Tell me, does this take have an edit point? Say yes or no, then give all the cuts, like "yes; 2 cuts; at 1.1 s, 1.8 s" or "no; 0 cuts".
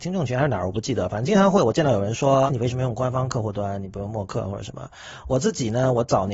yes; 1 cut; at 2.5 s